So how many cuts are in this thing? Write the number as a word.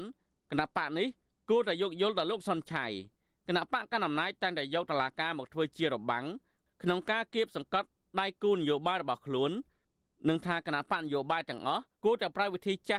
one